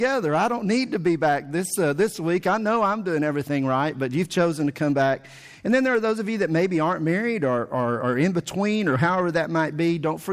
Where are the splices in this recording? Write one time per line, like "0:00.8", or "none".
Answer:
none